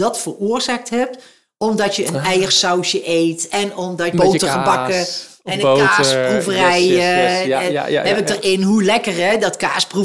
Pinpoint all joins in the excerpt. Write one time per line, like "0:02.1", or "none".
0:04.1